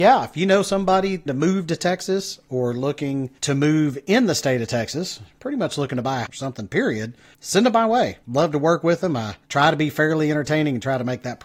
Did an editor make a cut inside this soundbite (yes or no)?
yes